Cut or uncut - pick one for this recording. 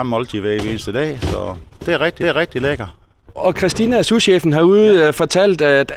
cut